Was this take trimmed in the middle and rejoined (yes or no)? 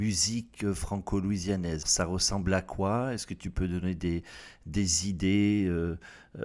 yes